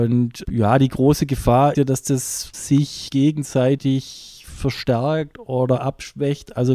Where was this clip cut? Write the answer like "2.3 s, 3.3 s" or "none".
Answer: 1.7 s